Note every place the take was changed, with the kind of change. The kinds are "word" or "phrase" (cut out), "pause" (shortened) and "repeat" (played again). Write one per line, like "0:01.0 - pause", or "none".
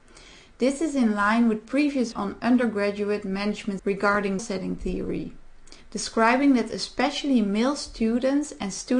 0:02.1 - word
0:03.8 - word
0:04.4 - word
0:05.8 - pause